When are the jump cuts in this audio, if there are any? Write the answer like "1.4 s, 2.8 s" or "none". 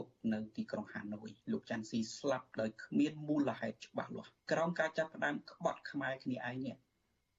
1.4 s, 2.5 s, 4.4 s